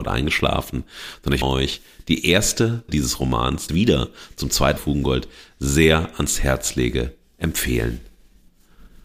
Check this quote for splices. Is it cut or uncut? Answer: cut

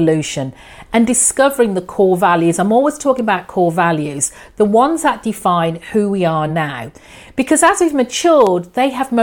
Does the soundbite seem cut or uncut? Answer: uncut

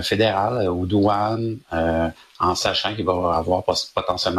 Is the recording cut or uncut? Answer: uncut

